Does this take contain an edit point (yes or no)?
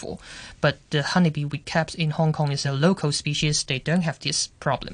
no